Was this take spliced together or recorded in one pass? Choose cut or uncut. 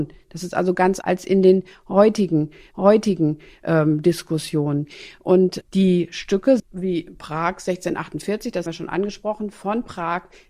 cut